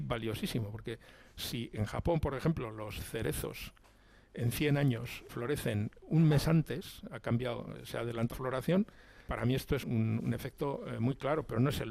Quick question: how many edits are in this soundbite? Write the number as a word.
four